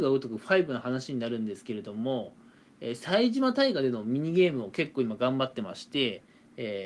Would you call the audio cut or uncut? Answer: uncut